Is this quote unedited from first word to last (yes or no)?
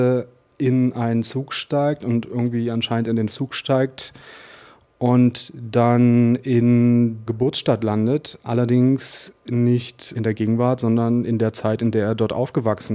no